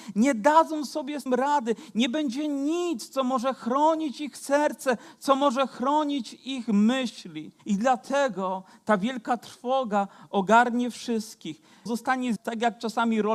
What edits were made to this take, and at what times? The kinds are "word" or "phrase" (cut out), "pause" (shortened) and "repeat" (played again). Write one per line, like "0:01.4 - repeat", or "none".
0:01.3 - word
0:07.6 - pause
0:11.9 - word
0:12.4 - word